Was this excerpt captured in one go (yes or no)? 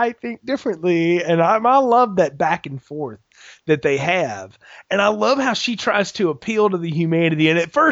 yes